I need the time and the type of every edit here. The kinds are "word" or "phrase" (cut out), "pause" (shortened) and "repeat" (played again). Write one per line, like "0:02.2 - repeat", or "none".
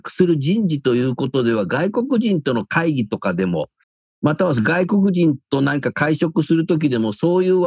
0:03.8 - pause